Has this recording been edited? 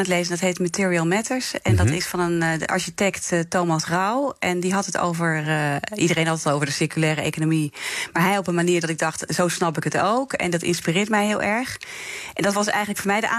no; 0 cuts

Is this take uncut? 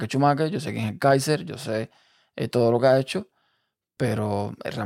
yes; 0 cuts

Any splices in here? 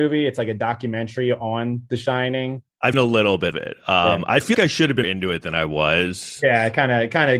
yes; 4 cuts; at 2.9 s, 3.5 s, 4.5 s, 5.0 s

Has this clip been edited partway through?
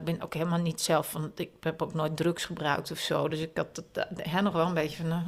no; 0 cuts

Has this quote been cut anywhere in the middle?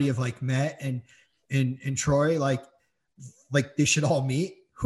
no; 0 cuts

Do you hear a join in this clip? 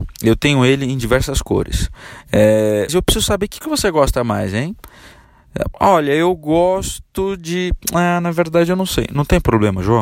yes; 2 cuts; at 2.9 s, 3.6 s

